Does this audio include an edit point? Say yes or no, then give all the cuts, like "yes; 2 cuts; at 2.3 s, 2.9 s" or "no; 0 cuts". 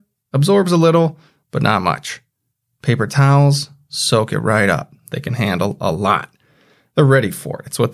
no; 0 cuts